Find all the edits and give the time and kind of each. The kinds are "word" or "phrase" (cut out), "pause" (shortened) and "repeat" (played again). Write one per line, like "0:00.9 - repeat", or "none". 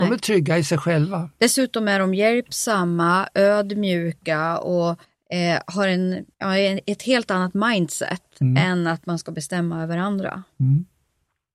0:05.0 - pause
0:06.3 - pause